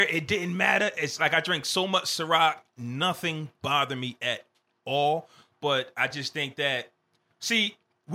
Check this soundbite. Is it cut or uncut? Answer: uncut